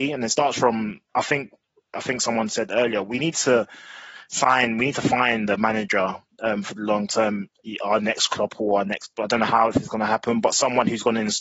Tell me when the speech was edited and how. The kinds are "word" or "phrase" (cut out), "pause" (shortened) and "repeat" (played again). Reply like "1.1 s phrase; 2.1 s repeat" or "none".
none